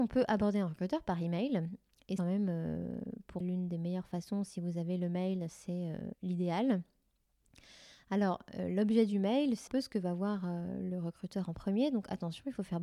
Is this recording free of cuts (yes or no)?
no